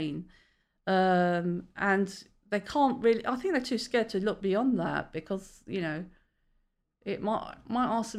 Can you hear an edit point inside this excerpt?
no; 0 cuts

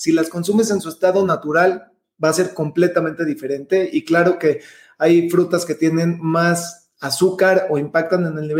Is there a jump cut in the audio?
no; 0 cuts

